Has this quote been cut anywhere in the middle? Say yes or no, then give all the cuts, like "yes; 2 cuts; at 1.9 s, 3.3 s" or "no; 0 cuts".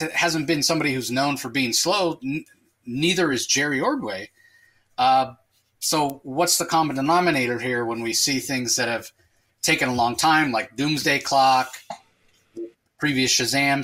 no; 0 cuts